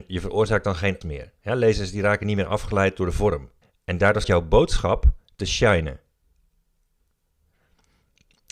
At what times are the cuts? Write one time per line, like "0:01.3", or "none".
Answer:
0:01.0
0:01.4
0:03.6
0:04.2